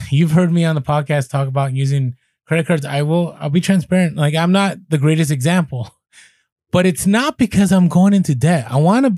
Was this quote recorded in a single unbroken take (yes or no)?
yes